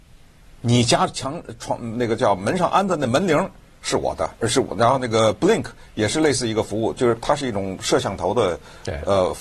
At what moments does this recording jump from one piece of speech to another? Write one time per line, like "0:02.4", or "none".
0:04.4